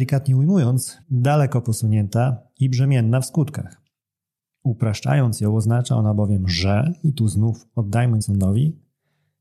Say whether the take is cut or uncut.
cut